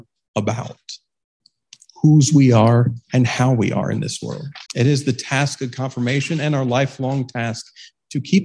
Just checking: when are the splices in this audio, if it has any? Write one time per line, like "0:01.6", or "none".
0:03.0
0:04.7